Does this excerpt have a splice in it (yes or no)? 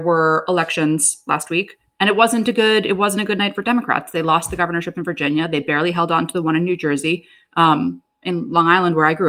no